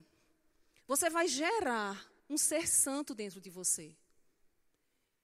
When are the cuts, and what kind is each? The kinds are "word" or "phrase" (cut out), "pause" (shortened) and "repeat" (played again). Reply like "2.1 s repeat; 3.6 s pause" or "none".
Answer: 2.2 s pause